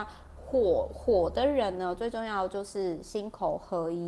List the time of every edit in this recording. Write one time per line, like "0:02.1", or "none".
none